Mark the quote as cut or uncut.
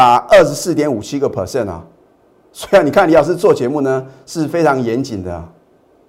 uncut